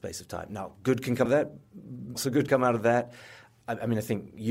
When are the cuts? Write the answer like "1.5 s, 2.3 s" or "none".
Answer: 1.3 s, 2.2 s, 2.5 s